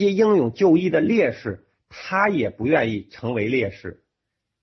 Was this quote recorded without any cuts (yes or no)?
yes